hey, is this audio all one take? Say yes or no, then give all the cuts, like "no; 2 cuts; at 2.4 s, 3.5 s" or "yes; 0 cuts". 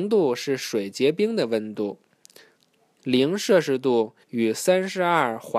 no; 1 cut; at 4.2 s